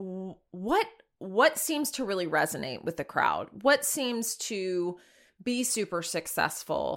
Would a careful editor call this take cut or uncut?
uncut